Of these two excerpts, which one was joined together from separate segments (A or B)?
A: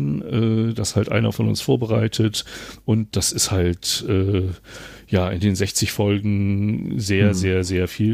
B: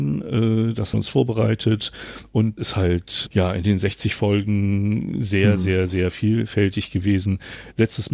B